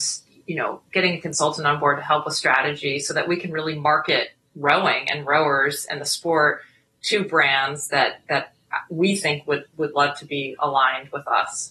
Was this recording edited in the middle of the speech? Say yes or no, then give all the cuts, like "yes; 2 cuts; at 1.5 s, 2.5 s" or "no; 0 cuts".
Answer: no; 0 cuts